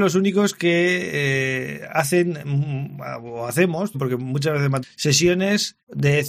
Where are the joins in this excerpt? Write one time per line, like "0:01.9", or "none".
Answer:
0:03.9
0:04.8